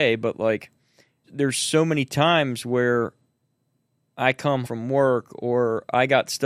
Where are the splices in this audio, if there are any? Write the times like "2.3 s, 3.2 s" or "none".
1.2 s, 4.6 s